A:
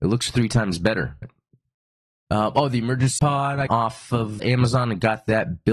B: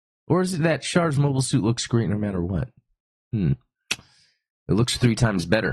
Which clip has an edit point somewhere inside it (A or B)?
A